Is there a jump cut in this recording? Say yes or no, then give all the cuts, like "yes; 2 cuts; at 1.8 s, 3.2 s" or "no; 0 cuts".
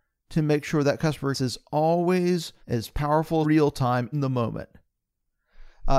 yes; 4 cuts; at 1.3 s, 2.6 s, 3.4 s, 4.1 s